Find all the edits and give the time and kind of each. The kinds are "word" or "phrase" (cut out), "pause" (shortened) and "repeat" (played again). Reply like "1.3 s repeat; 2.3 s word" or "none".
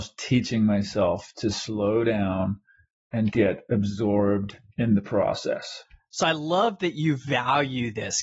none